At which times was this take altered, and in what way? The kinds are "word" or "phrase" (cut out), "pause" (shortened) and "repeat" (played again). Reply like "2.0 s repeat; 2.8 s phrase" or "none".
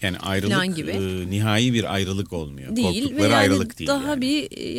none